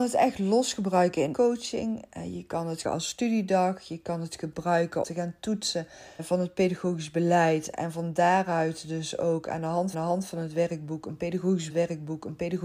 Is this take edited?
yes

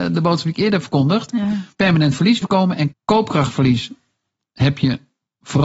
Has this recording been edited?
yes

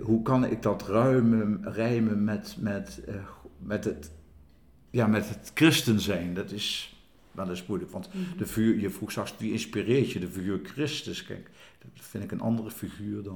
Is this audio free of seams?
yes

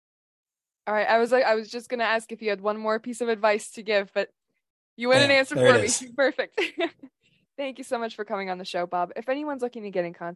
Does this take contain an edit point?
no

